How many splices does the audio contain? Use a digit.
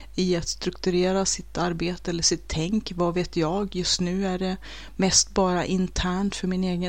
0